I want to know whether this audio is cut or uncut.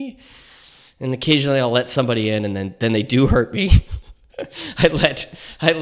uncut